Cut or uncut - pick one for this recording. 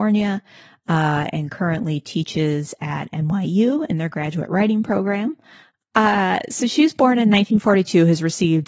uncut